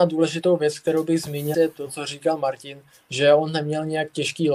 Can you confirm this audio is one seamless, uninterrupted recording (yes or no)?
no